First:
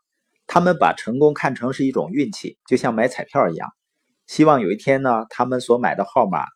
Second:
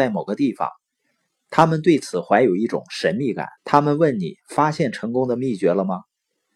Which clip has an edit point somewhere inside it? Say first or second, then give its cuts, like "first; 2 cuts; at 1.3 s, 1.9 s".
second; 1 cut; at 3.6 s